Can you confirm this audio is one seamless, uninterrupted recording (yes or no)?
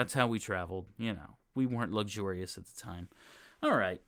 yes